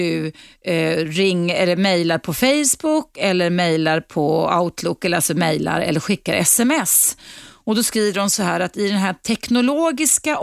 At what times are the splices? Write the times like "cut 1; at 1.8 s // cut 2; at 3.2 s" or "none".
none